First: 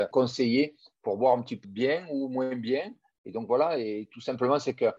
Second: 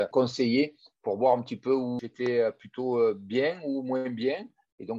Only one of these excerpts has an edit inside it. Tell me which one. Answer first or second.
first